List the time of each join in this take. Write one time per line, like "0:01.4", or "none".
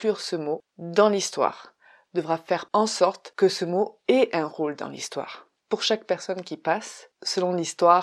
none